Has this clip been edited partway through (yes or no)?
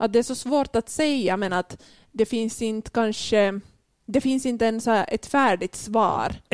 no